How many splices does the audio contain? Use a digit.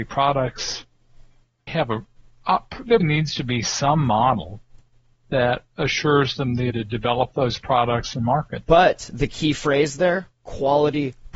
4